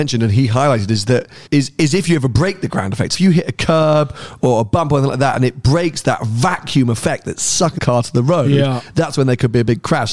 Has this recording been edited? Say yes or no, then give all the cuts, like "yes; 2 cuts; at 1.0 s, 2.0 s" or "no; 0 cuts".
yes; 3 cuts; at 1.5 s, 3.1 s, 7.8 s